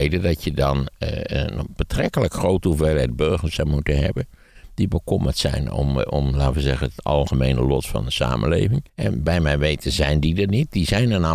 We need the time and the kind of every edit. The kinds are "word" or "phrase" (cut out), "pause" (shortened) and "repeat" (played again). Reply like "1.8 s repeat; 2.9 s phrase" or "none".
8.9 s pause